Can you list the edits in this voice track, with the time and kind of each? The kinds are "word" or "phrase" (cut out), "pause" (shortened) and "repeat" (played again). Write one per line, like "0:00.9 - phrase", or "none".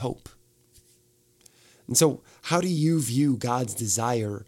none